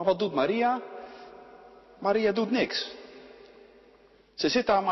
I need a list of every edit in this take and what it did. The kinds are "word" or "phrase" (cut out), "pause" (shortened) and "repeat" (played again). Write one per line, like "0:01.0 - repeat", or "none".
none